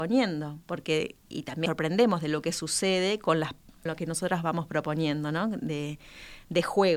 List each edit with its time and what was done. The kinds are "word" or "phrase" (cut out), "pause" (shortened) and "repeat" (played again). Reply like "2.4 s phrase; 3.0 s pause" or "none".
1.3 s word; 1.7 s word; 3.9 s word

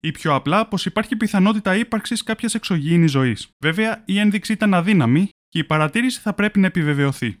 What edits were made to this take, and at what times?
3.5 s pause

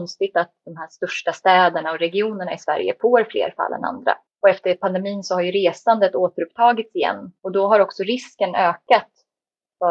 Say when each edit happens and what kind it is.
4.3 s pause; 7.4 s pause

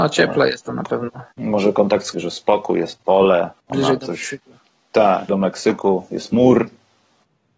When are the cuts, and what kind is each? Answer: 1.3 s pause; 2.1 s phrase; 3.5 s pause; 5.3 s word

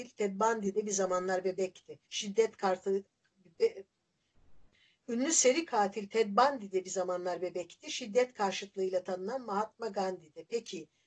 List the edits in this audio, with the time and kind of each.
2.0 s pause

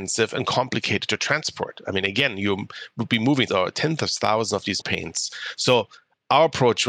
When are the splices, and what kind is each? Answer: 3.5 s word; 4.8 s word

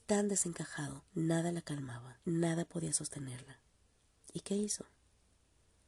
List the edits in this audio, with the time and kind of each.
1.1 s pause; 2.2 s pause; 4.0 s pause

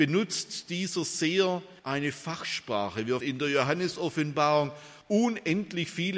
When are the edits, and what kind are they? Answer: 1.8 s pause; 3.2 s word; 5.0 s pause

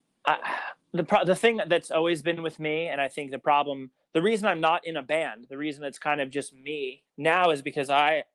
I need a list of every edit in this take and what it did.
7.1 s pause

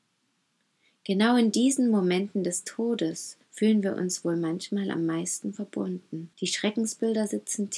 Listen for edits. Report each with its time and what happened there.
3.4 s pause; 6.3 s pause

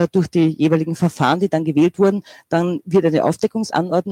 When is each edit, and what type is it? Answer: none

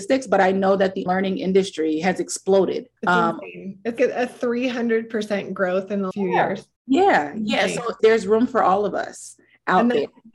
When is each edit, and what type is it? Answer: 1.1 s word; 3.0 s pause; 4.0 s word; 6.1 s word; 6.8 s pause; 8.0 s word

